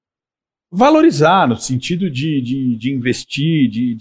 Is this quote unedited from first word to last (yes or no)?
yes